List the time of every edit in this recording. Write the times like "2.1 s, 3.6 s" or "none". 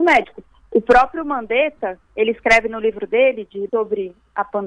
2.1 s, 3.7 s